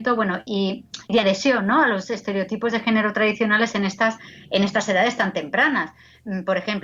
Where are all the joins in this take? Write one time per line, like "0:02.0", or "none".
0:01.1